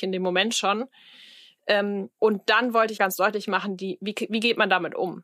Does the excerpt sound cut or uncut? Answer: cut